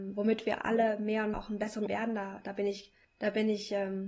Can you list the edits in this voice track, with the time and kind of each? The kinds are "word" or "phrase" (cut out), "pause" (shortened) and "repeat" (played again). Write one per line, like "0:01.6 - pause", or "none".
0:01.3 - word
0:01.9 - phrase
0:03.0 - pause